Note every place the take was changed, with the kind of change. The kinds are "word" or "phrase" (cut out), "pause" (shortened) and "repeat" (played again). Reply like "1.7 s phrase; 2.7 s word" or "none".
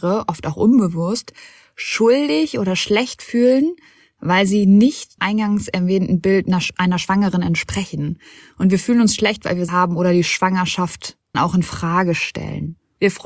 5.2 s word; 9.7 s word; 11.3 s word